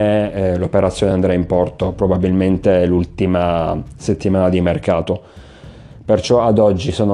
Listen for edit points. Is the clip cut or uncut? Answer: uncut